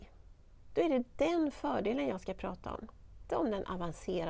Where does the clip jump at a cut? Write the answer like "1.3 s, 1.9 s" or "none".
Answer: 3.3 s